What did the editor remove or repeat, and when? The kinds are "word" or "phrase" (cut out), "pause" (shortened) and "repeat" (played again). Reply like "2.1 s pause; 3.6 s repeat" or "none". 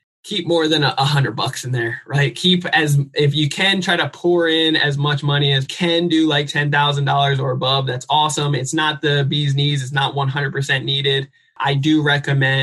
5.7 s phrase